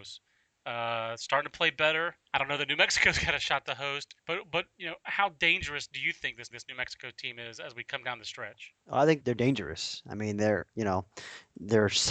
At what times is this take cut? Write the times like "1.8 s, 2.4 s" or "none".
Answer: 2.2 s, 4.2 s, 6.5 s, 8.8 s, 9.2 s